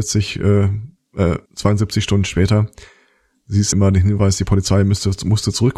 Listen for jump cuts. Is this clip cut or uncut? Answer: cut